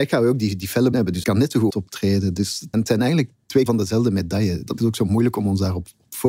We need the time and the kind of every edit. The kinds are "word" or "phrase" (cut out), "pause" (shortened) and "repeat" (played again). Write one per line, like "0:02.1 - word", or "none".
0:00.9 - word
0:01.2 - word
0:01.7 - word
0:02.7 - word
0:03.7 - word
0:04.8 - word